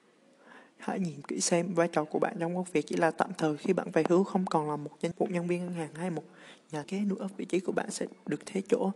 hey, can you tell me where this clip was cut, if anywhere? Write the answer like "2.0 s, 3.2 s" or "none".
1.2 s, 5.1 s, 6.8 s